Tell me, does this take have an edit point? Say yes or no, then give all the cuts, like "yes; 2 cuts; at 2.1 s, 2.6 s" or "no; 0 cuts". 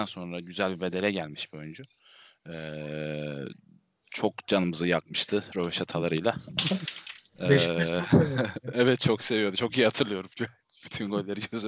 no; 0 cuts